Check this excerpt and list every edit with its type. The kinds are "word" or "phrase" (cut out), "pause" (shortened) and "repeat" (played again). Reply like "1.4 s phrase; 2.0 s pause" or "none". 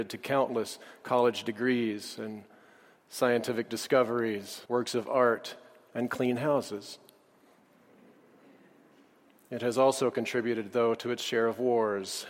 4.6 s pause